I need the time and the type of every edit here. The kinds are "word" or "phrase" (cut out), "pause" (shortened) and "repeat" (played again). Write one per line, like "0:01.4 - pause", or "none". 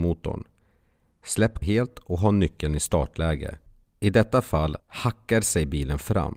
0:01.6 - word
0:03.8 - pause
0:04.8 - pause